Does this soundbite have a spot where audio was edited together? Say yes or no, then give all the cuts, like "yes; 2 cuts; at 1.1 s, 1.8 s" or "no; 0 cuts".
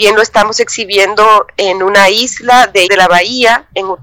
yes; 1 cut; at 2.9 s